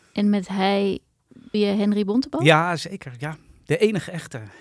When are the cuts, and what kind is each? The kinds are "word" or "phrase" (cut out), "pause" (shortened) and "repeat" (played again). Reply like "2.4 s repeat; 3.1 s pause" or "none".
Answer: 1.5 s word